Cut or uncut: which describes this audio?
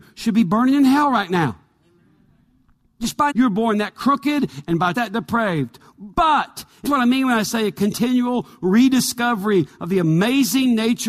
cut